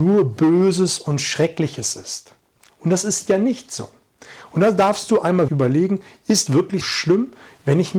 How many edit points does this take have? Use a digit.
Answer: 3